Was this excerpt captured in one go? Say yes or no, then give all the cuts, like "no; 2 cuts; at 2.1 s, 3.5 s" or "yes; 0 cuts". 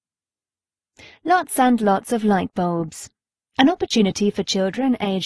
yes; 0 cuts